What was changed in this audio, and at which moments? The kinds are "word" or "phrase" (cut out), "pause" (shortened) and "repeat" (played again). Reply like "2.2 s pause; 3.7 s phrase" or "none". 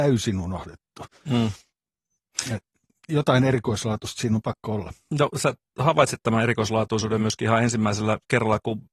none

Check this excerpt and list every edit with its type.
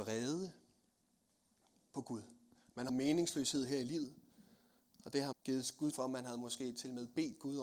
2.9 s word; 5.3 s word; 5.9 s word

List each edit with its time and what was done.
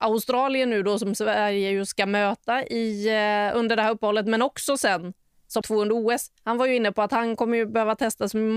5.6 s word; 6.4 s pause

